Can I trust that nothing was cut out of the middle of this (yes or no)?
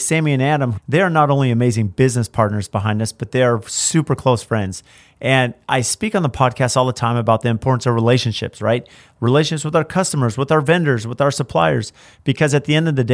yes